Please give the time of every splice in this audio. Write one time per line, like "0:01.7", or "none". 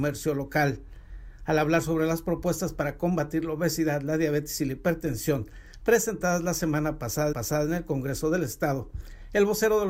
0:07.3

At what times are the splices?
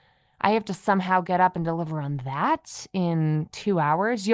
none

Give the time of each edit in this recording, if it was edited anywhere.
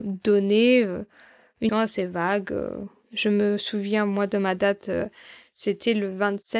0:01.7

